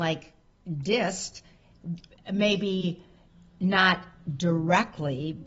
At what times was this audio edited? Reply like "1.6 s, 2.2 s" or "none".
none